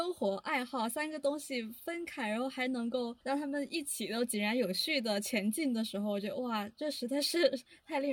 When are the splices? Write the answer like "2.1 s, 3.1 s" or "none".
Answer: 3.2 s